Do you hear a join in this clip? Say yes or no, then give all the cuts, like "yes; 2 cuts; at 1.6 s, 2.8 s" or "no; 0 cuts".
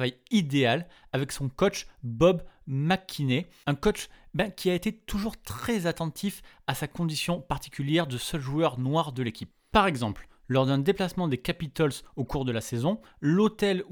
no; 0 cuts